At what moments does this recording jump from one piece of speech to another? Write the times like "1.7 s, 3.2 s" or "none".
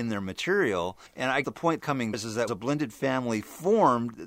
1.1 s, 1.4 s, 1.8 s, 2.1 s, 2.5 s